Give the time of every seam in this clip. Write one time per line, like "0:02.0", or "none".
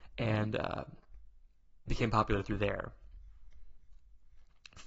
0:01.9